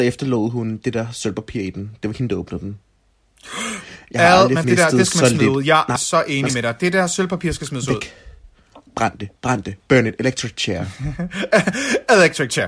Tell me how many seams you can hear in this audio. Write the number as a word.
three